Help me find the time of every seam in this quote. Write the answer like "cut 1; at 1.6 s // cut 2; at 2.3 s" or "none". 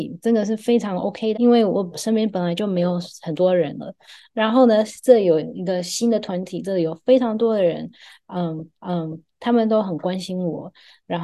cut 1; at 1.3 s // cut 2; at 8.8 s